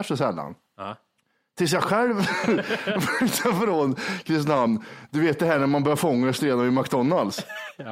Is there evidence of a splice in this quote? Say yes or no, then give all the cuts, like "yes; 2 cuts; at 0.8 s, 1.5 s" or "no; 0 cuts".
no; 0 cuts